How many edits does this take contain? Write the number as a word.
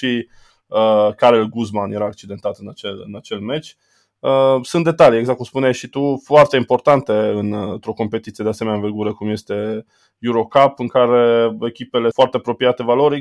one